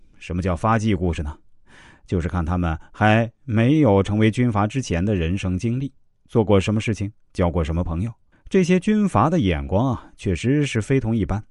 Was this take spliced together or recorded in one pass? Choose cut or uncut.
cut